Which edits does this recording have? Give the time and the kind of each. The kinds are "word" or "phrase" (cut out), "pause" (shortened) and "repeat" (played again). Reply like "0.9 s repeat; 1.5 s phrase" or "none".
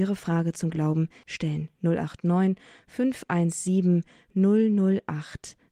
1.2 s word